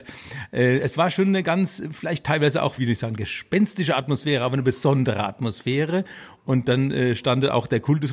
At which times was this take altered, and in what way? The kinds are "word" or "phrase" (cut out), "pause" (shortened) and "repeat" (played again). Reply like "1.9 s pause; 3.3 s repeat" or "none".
2.8 s word